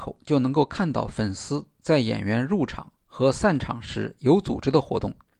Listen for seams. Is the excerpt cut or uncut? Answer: cut